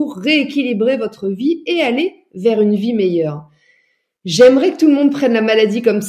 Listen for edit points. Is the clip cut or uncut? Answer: uncut